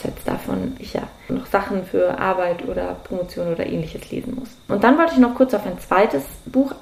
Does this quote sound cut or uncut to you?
uncut